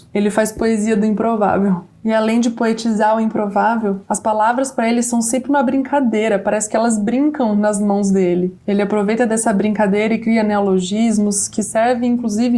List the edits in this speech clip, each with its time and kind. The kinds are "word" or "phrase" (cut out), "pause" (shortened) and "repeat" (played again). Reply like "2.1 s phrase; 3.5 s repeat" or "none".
none